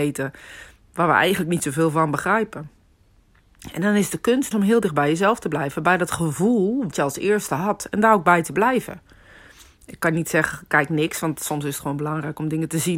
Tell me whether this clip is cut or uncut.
cut